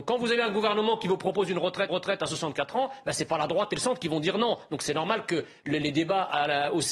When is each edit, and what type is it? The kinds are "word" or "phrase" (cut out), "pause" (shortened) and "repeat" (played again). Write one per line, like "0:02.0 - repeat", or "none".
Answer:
0:01.9 - repeat